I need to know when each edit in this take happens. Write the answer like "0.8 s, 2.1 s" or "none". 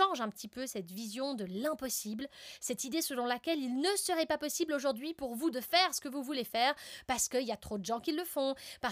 none